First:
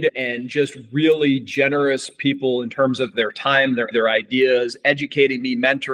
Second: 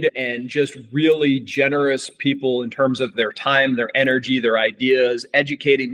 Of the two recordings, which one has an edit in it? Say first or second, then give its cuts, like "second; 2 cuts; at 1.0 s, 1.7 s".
first; 1 cut; at 3.9 s